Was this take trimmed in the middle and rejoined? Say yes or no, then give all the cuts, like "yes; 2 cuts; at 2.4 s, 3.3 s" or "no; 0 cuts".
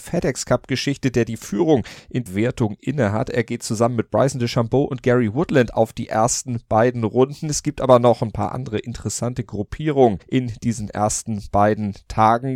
yes; 2 cuts; at 2.3 s, 10.2 s